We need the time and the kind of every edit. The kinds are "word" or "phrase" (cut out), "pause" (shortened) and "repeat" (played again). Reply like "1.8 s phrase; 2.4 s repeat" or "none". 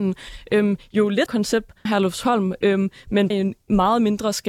1.3 s word; 1.9 s word; 3.3 s word